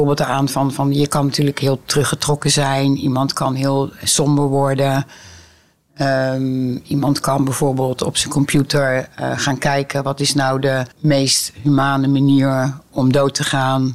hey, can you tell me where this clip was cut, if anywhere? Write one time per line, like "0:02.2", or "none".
0:10.9